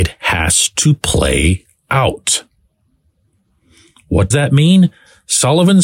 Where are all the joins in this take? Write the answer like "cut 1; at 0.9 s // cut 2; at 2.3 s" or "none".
cut 1; at 4.3 s